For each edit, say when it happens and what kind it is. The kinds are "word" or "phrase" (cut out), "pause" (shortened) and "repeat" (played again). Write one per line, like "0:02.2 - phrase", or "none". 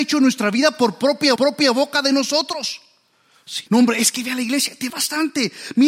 0:01.4 - repeat
0:03.7 - pause
0:04.9 - phrase